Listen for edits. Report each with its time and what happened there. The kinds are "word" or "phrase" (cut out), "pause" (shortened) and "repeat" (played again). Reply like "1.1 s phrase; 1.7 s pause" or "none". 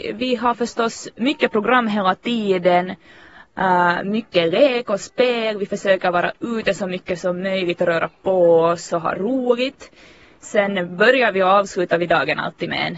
1.2 s word